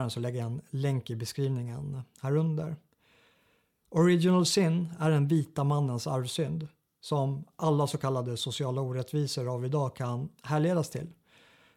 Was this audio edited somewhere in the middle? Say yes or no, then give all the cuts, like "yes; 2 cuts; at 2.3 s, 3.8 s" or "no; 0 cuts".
no; 0 cuts